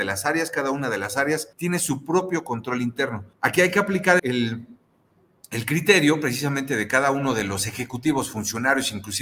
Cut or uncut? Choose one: cut